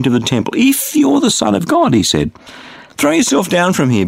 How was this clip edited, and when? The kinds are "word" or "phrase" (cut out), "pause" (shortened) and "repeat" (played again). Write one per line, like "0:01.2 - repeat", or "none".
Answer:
none